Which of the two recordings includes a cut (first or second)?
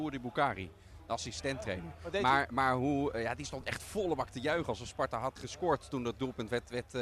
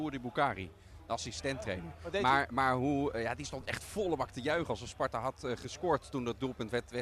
first